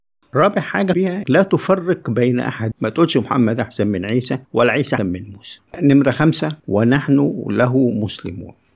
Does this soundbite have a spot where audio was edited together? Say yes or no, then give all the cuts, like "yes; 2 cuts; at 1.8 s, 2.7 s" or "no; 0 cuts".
yes; 7 cuts; at 0.9 s, 1.2 s, 2.7 s, 4.5 s, 5.0 s, 5.7 s, 6.6 s